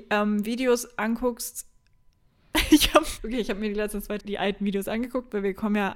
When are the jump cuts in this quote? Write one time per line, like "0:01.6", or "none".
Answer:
0:03.2
0:04.2